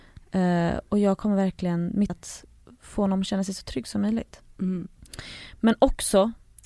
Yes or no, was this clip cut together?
yes